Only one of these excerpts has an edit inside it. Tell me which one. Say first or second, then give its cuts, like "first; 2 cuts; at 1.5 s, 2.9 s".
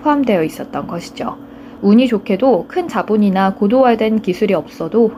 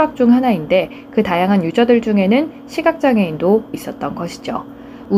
second; 1 cut; at 3.7 s